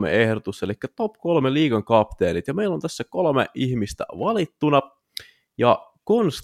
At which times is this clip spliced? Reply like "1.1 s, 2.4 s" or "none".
none